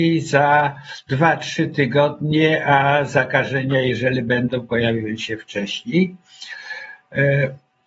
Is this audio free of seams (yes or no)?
yes